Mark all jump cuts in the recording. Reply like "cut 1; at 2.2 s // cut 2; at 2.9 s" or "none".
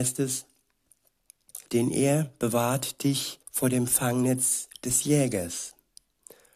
cut 1; at 1.7 s // cut 2; at 3.4 s

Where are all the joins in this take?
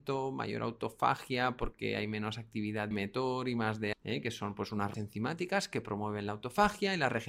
cut 1; at 2.9 s // cut 2; at 3.9 s // cut 3; at 4.9 s

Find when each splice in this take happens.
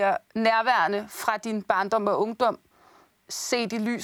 none

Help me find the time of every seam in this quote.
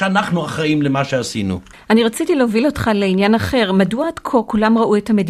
none

